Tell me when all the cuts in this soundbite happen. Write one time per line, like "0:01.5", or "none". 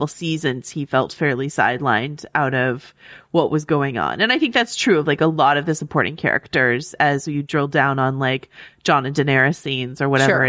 none